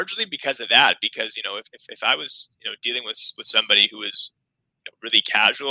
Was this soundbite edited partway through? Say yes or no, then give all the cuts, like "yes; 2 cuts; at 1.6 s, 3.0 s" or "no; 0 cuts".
no; 0 cuts